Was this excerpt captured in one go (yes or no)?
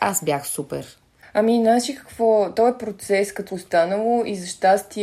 no